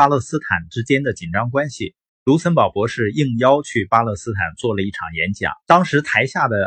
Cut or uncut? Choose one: cut